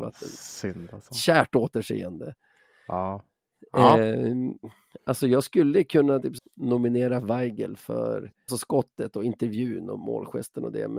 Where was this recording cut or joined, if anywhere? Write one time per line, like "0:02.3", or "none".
0:06.4
0:08.5

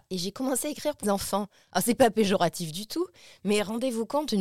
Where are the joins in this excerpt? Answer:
0:01.0

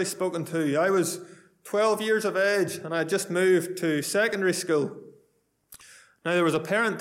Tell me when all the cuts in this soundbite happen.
none

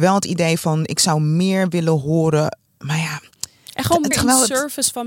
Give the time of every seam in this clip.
0:02.7
0:04.1

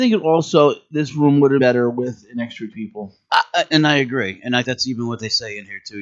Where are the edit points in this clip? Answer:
0:01.6
0:02.7
0:04.6

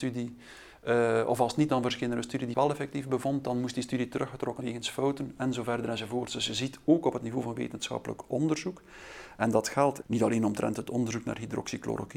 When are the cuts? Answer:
0:01.7
0:02.5
0:04.6
0:10.0

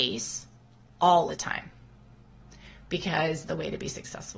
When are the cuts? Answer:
0:01.3
0:03.5

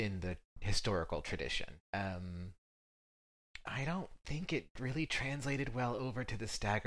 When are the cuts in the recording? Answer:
0:01.8

